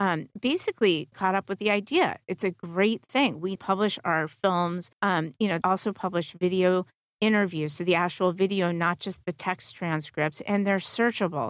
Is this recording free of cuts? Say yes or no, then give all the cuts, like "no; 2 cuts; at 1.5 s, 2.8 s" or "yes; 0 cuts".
no; 4 cuts; at 1.1 s, 3.6 s, 4.9 s, 5.6 s